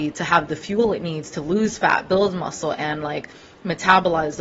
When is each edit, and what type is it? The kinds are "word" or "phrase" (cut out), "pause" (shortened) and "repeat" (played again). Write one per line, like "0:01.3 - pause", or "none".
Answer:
none